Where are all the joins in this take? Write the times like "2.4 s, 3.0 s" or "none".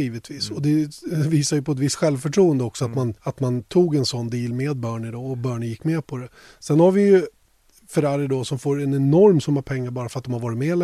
3.2 s